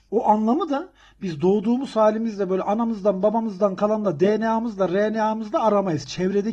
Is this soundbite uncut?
yes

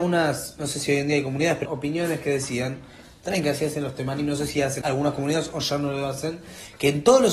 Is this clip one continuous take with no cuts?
no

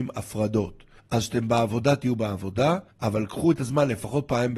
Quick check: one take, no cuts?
no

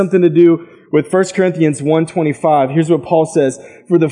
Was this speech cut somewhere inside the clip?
no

